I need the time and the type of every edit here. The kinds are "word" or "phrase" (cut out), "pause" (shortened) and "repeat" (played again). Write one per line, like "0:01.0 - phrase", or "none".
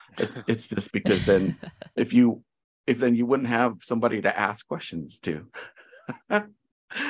0:03.0 - phrase